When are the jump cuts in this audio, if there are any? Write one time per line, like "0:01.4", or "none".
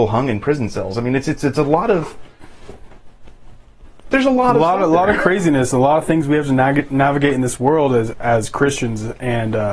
0:08.1